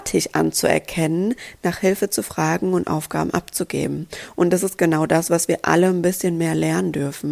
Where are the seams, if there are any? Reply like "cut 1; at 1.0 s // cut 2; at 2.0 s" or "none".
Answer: none